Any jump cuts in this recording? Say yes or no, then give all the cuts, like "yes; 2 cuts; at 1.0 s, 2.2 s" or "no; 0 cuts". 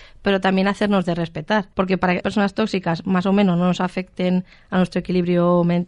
yes; 2 cuts; at 1.7 s, 2.2 s